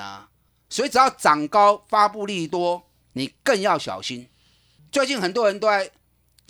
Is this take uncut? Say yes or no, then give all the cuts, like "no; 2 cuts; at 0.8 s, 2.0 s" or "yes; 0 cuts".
yes; 0 cuts